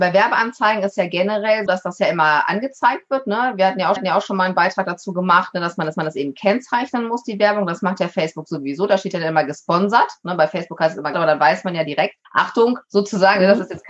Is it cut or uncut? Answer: cut